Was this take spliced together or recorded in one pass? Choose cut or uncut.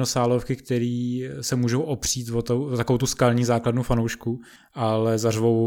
uncut